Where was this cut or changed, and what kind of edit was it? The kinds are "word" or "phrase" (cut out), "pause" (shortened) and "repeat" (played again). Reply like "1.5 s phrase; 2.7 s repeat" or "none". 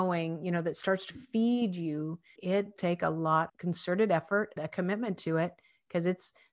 1.1 s word; 2.4 s word; 2.8 s word; 3.5 s word; 4.6 s word